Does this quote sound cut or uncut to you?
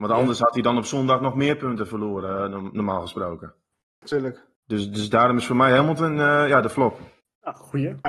uncut